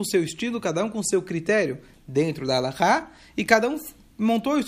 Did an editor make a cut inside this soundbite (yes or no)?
no